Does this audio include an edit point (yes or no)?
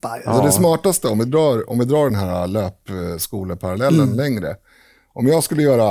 no